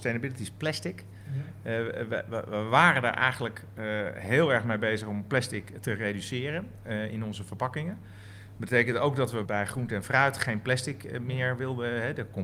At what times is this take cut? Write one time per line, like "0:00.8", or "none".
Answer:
0:09.4